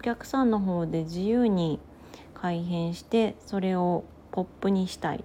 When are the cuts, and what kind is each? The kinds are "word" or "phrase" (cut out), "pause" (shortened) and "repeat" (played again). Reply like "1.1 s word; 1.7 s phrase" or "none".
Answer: none